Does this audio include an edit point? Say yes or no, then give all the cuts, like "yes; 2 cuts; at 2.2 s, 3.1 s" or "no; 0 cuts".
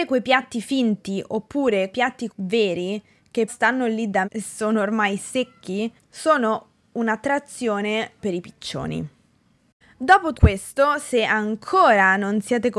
yes; 7 cuts; at 1.9 s, 2.3 s, 3.5 s, 4.2 s, 6.0 s, 8.2 s, 10.3 s